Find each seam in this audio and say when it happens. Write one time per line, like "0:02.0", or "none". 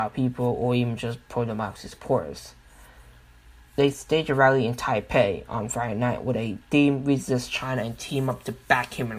none